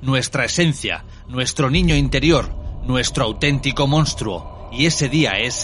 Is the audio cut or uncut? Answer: uncut